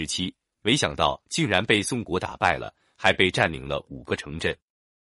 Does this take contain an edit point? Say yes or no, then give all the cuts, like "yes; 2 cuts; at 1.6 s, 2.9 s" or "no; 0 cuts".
no; 0 cuts